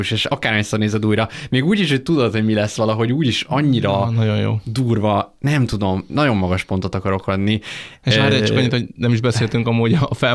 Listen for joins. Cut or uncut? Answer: uncut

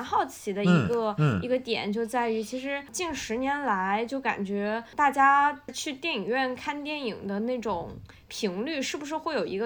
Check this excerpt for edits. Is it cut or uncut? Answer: uncut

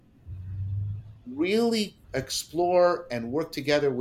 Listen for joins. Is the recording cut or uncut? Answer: cut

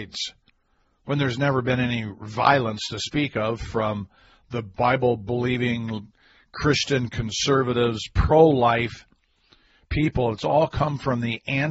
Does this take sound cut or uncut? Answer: uncut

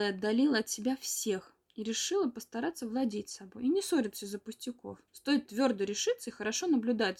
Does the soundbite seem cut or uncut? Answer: cut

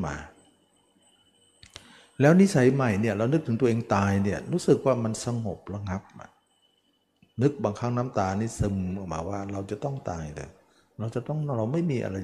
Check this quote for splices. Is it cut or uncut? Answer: uncut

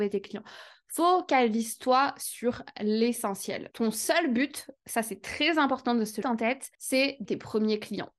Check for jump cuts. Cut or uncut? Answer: cut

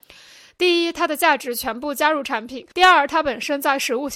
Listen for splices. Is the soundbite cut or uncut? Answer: cut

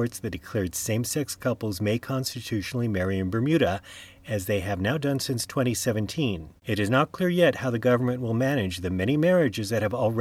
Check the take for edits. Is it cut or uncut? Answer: cut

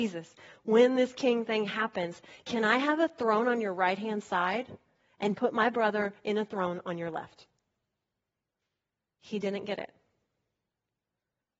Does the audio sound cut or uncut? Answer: uncut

